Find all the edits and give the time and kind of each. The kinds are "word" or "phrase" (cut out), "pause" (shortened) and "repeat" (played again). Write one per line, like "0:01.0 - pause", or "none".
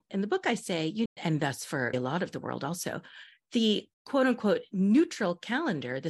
0:01.1 - phrase
0:01.9 - word
0:03.9 - pause

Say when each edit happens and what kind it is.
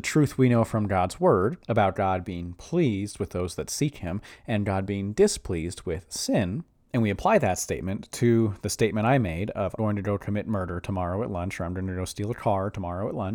0:01.6 - pause
0:09.8 - word

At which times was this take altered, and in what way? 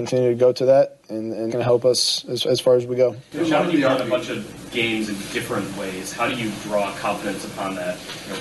0:01.5 - phrase

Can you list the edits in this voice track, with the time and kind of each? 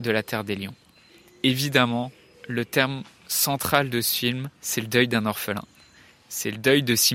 0:04.5 - pause

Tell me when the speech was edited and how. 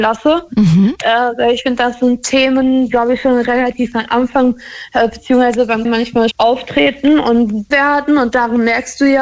0:02.9 - word
0:05.8 - word
0:06.3 - word
0:07.7 - word

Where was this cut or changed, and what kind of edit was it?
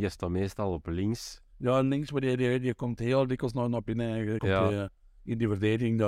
0:04.4 - phrase

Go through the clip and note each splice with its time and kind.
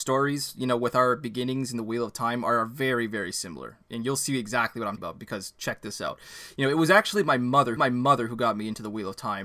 0:05.0 - word
0:07.8 - repeat

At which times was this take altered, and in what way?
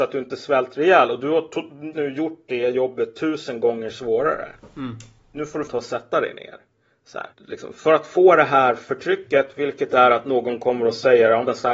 0:01.9 - word
0:05.7 - word
0:07.3 - pause

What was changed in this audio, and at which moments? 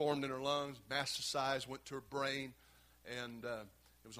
none

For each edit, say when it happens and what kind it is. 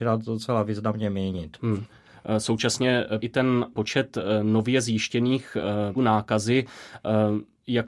0:03.2 - word
0:03.7 - word
0:06.0 - word

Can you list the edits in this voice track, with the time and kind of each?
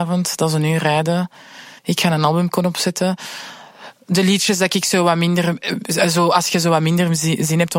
0:01.8 - pause

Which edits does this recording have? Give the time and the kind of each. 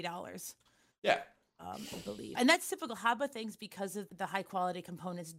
0:02.4 - word
0:04.1 - word

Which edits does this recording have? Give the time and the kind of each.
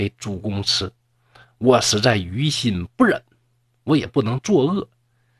none

